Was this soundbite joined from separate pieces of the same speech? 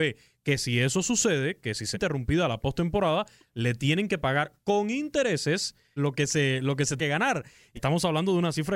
yes; 4 cuts; at 1.9 s, 6.0 s, 7.0 s, 7.8 s

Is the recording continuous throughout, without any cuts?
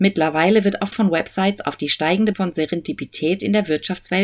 no; 2 cuts; at 0.9 s, 2.3 s

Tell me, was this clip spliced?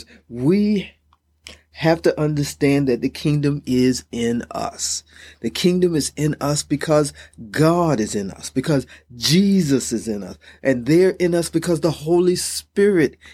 no; 0 cuts

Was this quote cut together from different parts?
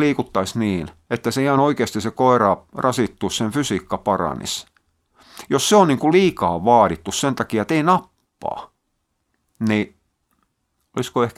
no; 0 cuts

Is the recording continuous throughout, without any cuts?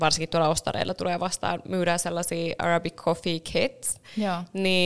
yes; 0 cuts

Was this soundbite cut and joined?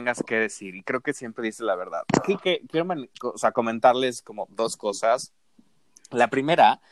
yes; 1 cut; at 2.4 s

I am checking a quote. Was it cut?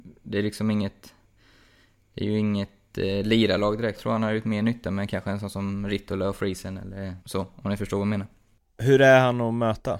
yes; 2 cuts; at 4.0 s, 7.2 s

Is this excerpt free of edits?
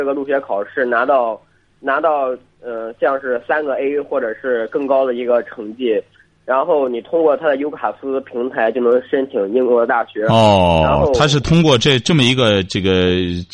yes; 0 cuts

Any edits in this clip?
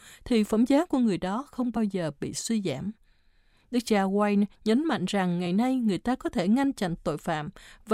no; 0 cuts

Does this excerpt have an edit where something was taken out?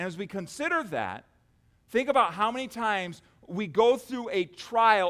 no; 0 cuts

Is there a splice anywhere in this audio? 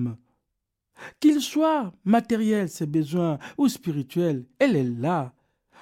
no; 0 cuts

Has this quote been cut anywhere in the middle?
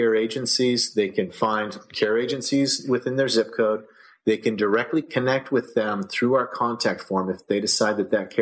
no; 0 cuts

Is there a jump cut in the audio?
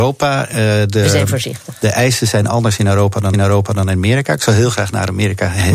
yes; 1 cut; at 3.3 s

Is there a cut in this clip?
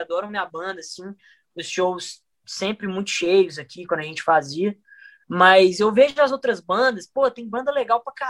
no; 0 cuts

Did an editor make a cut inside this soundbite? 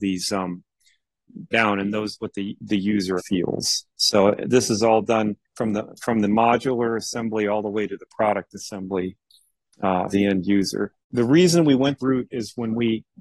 yes; 8 cuts; at 1.5 s, 2.2 s, 3.2 s, 3.9 s, 5.4 s, 10.1 s, 11.0 s, 12.0 s

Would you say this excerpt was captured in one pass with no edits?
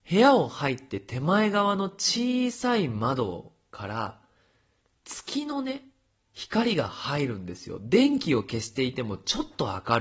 yes; 0 cuts

